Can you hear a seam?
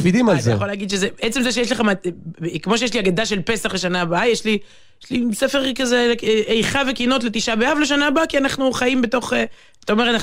no; 0 cuts

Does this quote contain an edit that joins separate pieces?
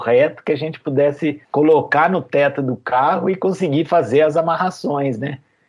yes; 1 cut; at 1.4 s

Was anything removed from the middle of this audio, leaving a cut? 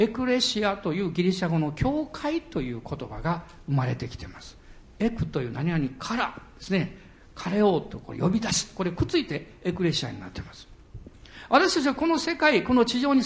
no; 0 cuts

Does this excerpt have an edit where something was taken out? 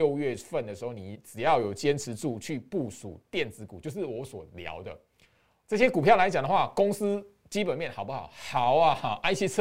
no; 0 cuts

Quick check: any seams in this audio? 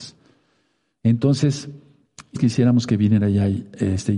yes; 1 cut; at 2.3 s

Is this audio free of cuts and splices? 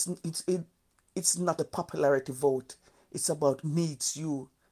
no; 2 cuts; at 1.6 s, 3.6 s

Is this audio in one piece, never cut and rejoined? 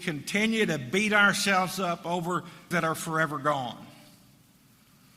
no; 1 cut; at 2.7 s

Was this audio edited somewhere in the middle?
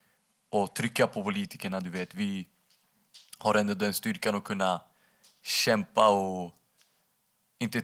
yes; 1 cut; at 5.4 s

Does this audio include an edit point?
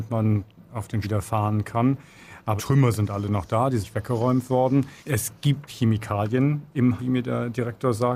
yes; 6 cuts; at 1.0 s, 2.6 s, 3.8 s, 5.0 s, 5.7 s, 7.0 s

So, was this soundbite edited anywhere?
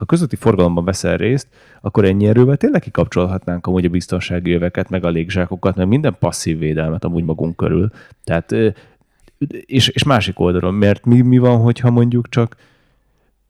no; 0 cuts

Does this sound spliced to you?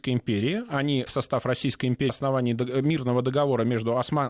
yes; 2 cuts; at 1.1 s, 2.1 s

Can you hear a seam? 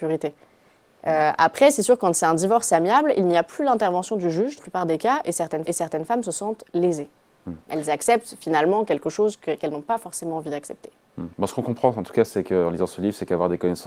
yes; 4 cuts; at 4.6 s, 5.7 s, 6.7 s, 11.3 s

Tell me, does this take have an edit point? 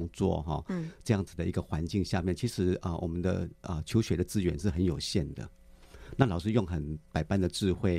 no; 0 cuts

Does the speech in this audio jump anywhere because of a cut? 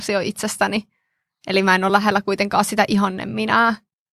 no; 0 cuts

